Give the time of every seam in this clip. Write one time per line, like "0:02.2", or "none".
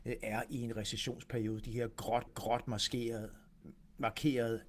0:02.3